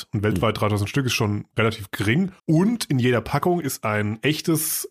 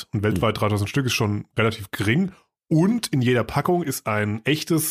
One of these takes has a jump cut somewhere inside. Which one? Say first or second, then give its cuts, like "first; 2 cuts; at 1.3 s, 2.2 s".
first; 1 cut; at 2.4 s